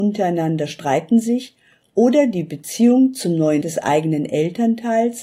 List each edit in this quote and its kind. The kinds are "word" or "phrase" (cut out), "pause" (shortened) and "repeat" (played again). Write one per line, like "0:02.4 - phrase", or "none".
0:03.6 - word